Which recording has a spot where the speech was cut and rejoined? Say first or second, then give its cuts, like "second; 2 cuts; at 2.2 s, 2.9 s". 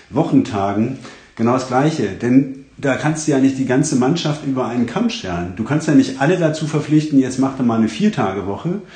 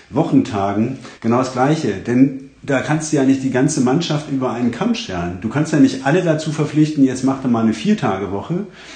second; 1 cut; at 1.2 s